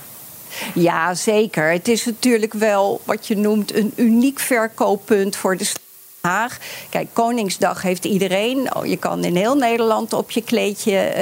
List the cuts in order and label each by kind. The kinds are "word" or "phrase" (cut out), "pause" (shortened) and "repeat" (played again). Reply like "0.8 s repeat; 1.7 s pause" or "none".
none

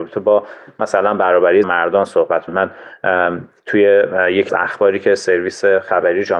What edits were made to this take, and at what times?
1.6 s phrase; 2.5 s word; 4.5 s word

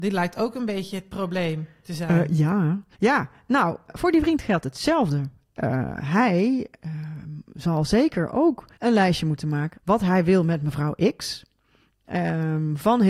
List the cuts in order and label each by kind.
2.9 s pause; 3.9 s word; 8.7 s pause; 9.7 s word

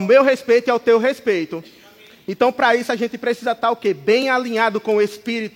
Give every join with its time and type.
none

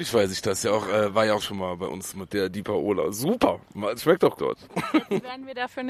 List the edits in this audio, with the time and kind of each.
1.4 s word; 2.3 s word; 4.0 s word; 4.4 s word

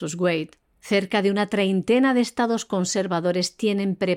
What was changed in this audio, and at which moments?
none

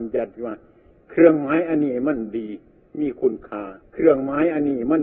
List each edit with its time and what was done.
3.8 s pause

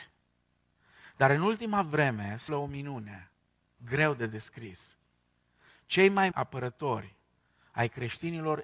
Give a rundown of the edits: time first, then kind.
2.5 s word; 6.3 s word

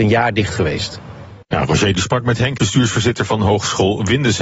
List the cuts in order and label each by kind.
1.4 s pause; 1.9 s word; 2.6 s word

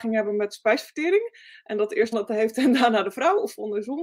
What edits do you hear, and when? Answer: 2.1 s word

